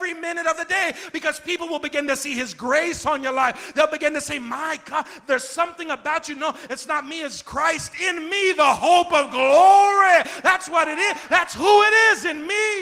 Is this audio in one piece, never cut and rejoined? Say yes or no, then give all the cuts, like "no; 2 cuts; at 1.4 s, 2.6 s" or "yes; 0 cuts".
yes; 0 cuts